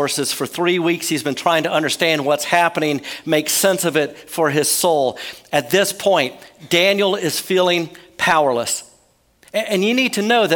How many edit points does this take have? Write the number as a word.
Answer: zero